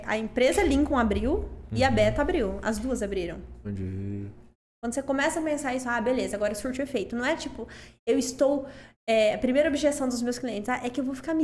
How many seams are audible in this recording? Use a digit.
0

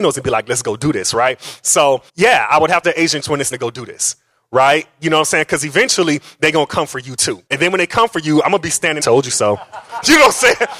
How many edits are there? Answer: 6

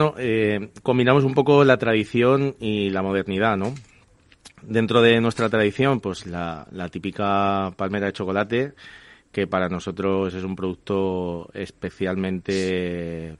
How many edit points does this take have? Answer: 0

